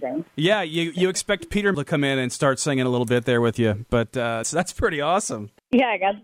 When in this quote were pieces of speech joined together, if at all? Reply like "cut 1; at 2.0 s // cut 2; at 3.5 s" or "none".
cut 1; at 1.7 s // cut 2; at 4.4 s